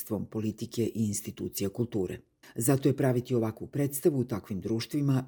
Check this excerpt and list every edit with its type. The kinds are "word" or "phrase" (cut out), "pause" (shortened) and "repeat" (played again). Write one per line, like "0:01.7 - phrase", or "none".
0:02.4 - pause